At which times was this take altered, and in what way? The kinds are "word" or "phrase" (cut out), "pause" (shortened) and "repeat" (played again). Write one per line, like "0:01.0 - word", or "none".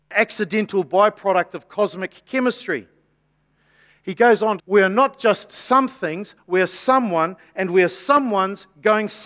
0:04.6 - phrase